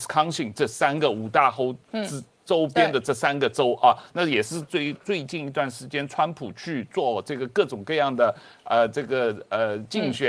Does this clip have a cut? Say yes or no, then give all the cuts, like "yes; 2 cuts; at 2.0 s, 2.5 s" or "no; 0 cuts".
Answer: no; 0 cuts